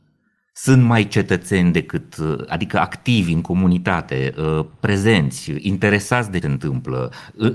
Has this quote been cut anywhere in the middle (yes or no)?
yes